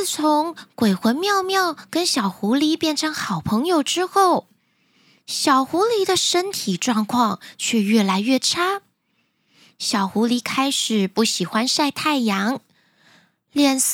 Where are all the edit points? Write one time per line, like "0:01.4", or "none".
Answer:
none